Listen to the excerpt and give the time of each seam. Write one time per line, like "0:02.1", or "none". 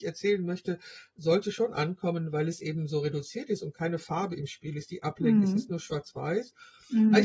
none